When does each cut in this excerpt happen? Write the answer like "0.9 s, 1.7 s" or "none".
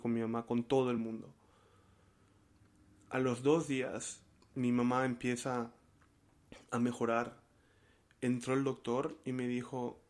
none